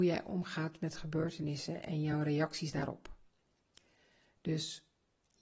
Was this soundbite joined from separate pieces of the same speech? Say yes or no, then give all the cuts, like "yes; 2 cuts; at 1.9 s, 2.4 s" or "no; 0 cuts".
no; 0 cuts